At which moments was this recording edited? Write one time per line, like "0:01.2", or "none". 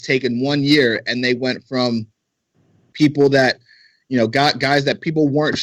none